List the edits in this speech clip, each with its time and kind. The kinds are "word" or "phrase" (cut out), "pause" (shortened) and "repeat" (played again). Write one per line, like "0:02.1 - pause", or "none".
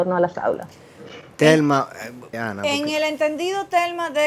0:02.3 - word